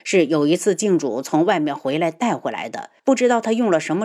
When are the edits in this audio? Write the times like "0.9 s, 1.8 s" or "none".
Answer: 3.0 s